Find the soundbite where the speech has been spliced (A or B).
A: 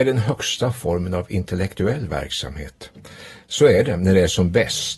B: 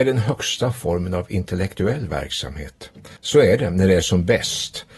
B